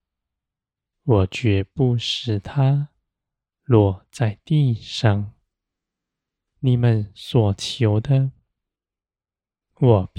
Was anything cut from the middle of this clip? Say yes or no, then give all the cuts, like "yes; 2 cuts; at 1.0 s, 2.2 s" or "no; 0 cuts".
no; 0 cuts